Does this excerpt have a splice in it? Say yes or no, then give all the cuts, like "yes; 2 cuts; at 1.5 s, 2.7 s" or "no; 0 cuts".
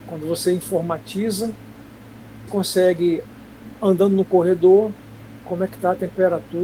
yes; 2 cuts; at 2.5 s, 5.4 s